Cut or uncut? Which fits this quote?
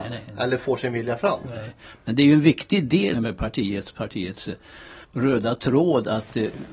cut